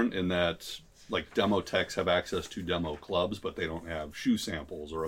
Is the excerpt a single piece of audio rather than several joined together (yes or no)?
yes